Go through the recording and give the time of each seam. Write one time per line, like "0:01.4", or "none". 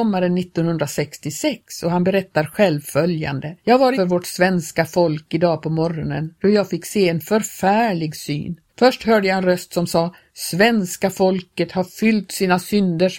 0:03.6
0:03.9
0:08.7